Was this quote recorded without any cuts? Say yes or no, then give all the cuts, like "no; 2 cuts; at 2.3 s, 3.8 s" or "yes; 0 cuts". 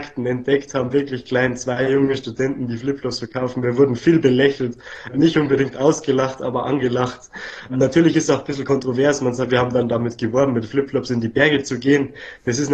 yes; 0 cuts